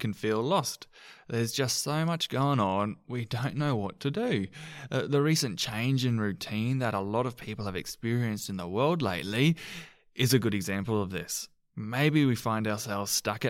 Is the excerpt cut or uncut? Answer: uncut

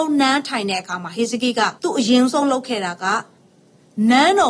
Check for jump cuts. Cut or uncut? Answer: cut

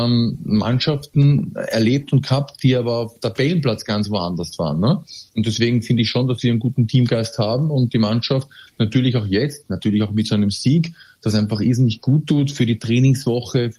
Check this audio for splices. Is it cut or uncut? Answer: uncut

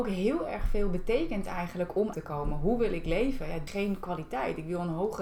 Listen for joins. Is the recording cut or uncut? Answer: cut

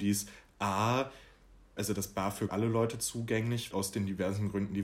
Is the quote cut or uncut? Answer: cut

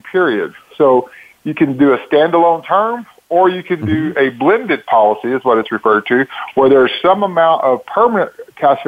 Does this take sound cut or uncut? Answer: uncut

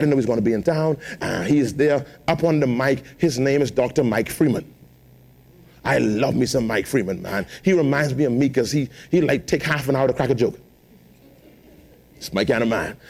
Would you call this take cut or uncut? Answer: uncut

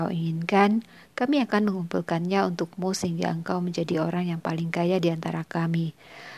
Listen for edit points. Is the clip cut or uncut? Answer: uncut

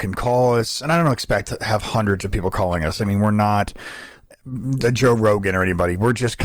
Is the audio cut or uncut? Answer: uncut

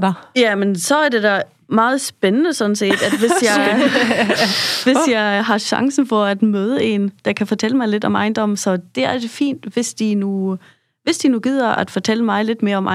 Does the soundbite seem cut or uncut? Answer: uncut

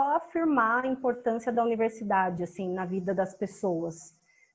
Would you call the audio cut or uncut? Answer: uncut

